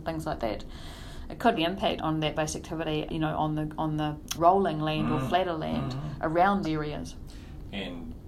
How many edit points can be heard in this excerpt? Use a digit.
6